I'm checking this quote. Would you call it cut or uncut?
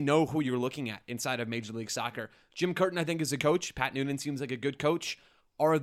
cut